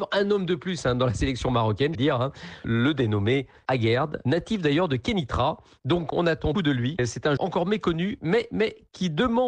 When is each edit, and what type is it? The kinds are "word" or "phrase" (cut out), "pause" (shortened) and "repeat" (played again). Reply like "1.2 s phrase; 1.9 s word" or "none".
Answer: 1.9 s word; 6.5 s word; 7.4 s word